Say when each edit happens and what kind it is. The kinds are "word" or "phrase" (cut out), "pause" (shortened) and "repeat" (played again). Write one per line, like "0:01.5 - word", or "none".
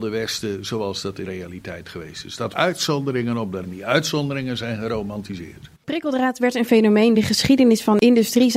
0:01.2 - word
0:02.5 - word
0:03.6 - word
0:05.7 - pause
0:07.2 - phrase